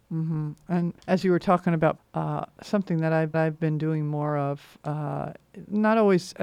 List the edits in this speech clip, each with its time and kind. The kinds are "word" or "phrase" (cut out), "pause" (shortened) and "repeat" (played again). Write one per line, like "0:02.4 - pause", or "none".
0:01.0 - pause
0:02.0 - phrase
0:03.3 - repeat

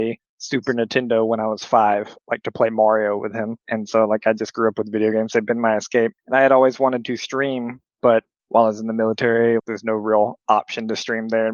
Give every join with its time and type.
0:03.6 - pause
0:06.2 - pause
0:09.6 - word

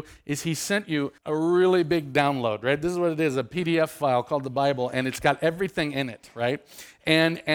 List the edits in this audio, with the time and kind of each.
0:01.2 - pause

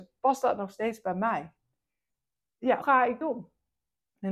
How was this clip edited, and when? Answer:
0:02.8 - word
0:03.2 - word

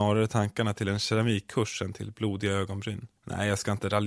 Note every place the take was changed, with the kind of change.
0:03.2 - pause

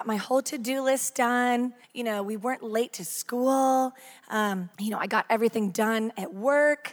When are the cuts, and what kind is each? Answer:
0:01.8 - pause
0:04.7 - pause

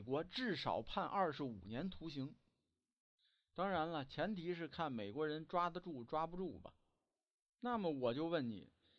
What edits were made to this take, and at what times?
none

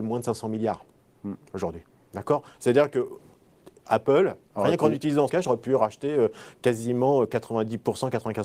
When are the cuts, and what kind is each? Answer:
0:05.3 - word

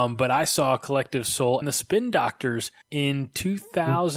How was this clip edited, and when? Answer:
0:01.6 - word
0:02.8 - pause

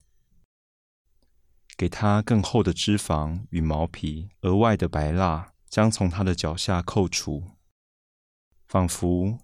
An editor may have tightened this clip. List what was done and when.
0:04.3 - pause
0:05.6 - pause

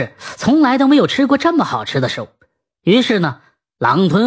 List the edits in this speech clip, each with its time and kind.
none

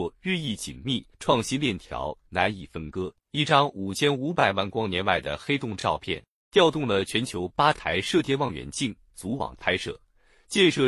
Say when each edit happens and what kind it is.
0:01.1 - pause
0:03.2 - pause

